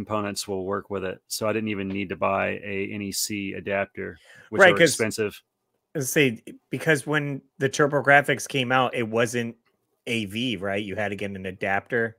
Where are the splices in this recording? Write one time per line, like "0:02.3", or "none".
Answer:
none